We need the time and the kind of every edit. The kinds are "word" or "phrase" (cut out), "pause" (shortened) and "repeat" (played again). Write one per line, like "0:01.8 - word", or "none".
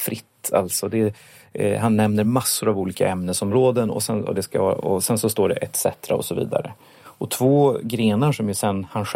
none